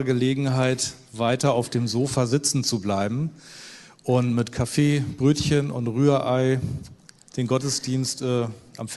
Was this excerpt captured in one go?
yes; 0 cuts

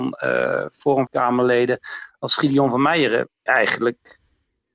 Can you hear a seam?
yes; 2 cuts; at 1.1 s, 3.5 s

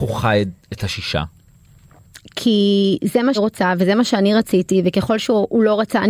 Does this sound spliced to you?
yes; 1 cut; at 3.3 s

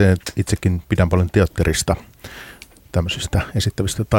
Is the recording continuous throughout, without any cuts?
yes; 0 cuts

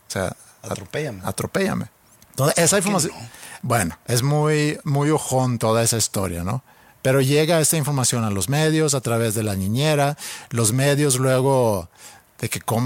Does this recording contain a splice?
no; 0 cuts

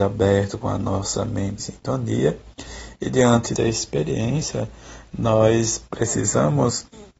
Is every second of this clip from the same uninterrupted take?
no; 2 cuts; at 1.6 s, 3.6 s

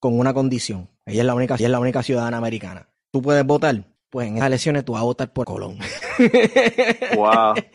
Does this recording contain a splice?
yes; 5 cuts; at 1.6 s, 2.9 s, 4.0 s, 4.4 s, 5.4 s

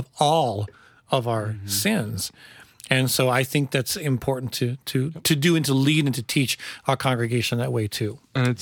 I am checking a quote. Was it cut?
no; 0 cuts

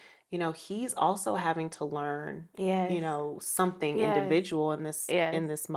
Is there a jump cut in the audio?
no; 0 cuts

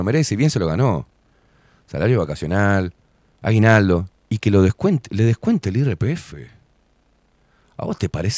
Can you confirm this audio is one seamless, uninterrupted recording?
yes; 0 cuts

